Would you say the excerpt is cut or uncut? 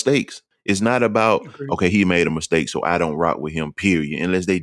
uncut